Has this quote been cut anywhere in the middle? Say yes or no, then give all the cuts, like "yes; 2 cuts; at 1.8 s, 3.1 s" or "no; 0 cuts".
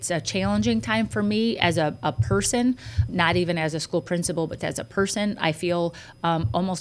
yes; 2 cuts; at 3.1 s, 4.6 s